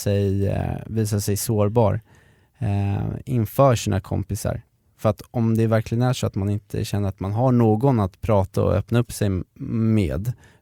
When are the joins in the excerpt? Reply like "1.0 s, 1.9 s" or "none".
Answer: 9.5 s